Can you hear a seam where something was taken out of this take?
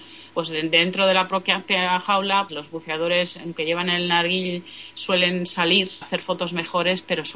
yes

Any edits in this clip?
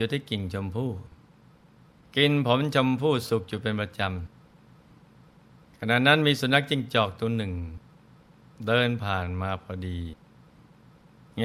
no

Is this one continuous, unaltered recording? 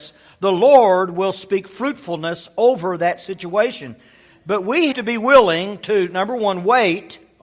no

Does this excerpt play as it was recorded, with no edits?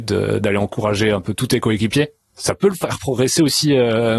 yes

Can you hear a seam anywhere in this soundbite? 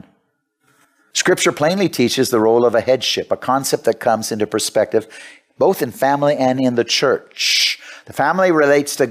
no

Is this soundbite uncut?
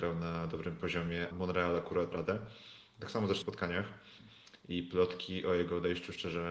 no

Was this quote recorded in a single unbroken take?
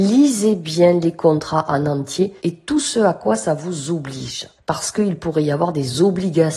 no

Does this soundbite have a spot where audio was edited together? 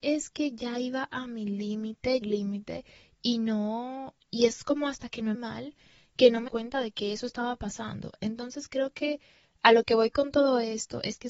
yes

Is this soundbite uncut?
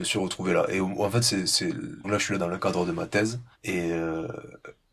no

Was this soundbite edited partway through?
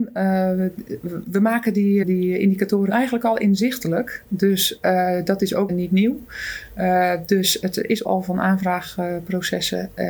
yes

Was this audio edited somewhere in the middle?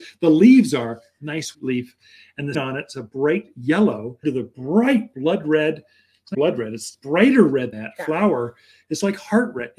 yes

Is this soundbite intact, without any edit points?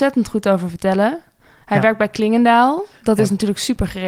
yes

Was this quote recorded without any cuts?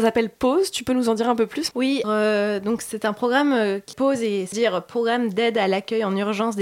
no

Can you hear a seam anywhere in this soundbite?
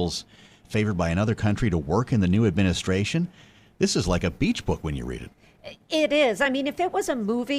no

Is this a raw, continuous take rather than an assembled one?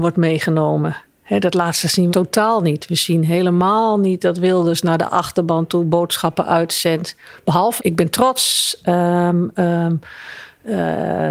no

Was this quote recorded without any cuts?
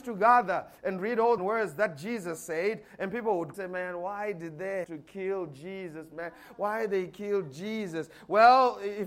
no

